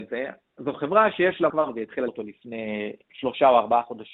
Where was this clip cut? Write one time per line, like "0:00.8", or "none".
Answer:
0:01.5
0:02.1
0:03.0